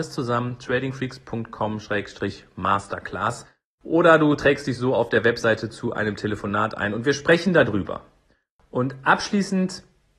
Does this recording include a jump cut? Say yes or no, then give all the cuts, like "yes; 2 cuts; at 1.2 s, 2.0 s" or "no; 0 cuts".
no; 0 cuts